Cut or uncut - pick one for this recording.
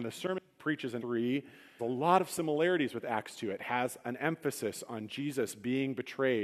cut